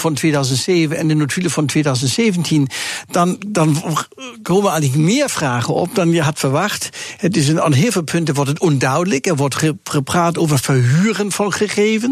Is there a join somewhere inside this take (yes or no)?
no